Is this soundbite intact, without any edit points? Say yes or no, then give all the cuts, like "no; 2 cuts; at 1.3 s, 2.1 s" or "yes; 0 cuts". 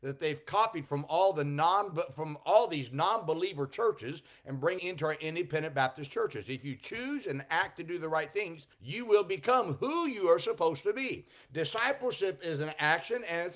no; 2 cuts; at 4.8 s, 8.7 s